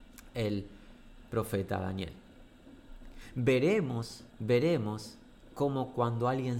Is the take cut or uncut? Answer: cut